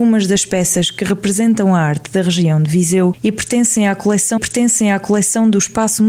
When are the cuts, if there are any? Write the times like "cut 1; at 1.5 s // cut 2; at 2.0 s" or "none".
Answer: cut 1; at 4.4 s